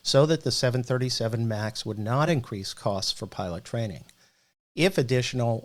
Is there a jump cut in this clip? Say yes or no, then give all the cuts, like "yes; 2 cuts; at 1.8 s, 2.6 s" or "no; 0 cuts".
no; 0 cuts